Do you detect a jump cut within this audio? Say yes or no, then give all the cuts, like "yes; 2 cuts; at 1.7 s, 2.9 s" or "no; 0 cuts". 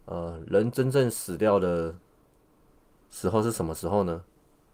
no; 0 cuts